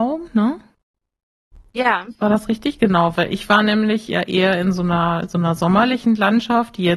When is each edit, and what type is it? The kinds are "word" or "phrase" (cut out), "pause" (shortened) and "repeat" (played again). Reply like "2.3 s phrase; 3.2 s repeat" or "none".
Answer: 3.2 s word

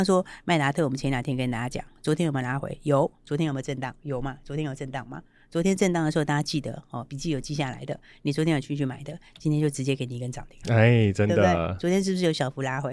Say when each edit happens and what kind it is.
none

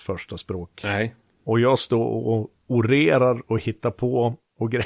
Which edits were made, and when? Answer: none

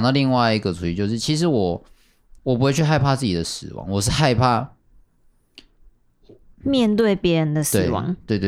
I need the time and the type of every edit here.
2.4 s pause; 6.4 s pause

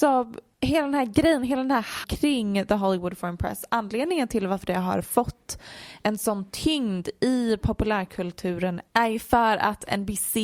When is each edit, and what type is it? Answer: 2.0 s word

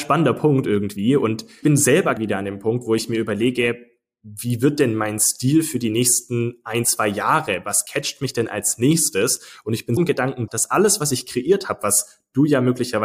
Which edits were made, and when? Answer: 1.6 s word; 2.2 s word; 10.0 s word; 10.5 s word

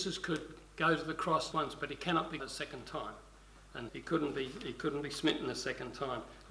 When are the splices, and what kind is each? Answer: 1.5 s word; 2.4 s word; 3.9 s word

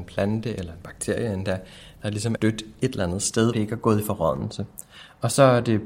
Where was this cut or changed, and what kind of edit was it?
2.4 s word; 3.5 s word

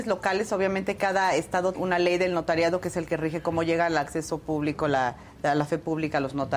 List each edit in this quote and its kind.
1.7 s word

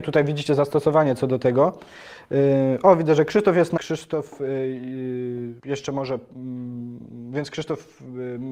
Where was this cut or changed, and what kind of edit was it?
3.8 s phrase; 5.6 s pause

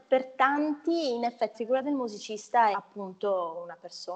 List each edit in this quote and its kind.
1.5 s word; 2.7 s word

